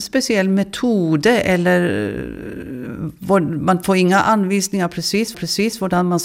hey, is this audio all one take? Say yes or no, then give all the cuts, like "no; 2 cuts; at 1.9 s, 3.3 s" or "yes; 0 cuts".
no; 1 cut; at 5.3 s